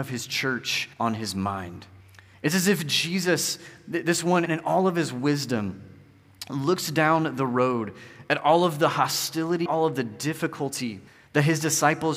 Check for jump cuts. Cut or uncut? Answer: cut